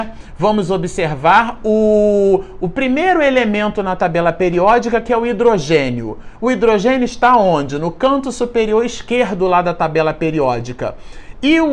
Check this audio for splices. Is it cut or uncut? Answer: uncut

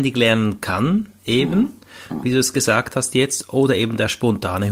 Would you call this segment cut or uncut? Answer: uncut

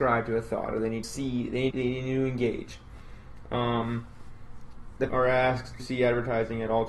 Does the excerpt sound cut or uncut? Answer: cut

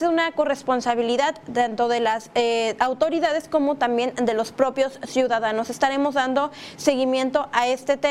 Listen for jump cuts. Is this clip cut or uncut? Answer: uncut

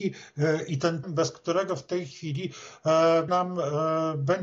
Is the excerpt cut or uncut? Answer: cut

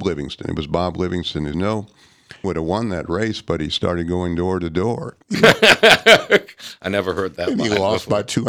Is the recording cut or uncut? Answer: cut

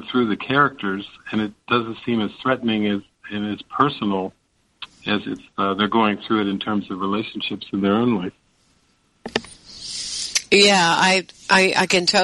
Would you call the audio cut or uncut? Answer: uncut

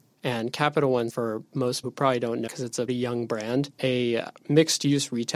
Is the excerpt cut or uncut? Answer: cut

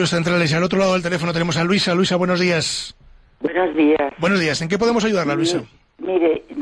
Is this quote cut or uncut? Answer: uncut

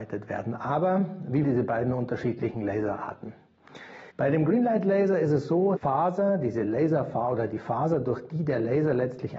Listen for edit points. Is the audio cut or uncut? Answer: cut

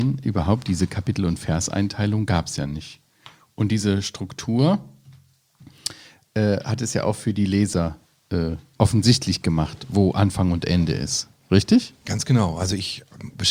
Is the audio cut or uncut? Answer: uncut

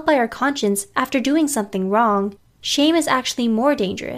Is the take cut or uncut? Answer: uncut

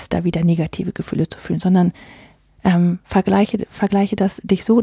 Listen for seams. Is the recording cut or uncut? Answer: uncut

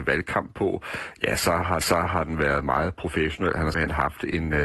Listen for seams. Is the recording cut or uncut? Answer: cut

